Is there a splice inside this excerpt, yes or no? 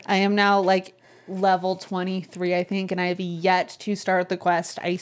no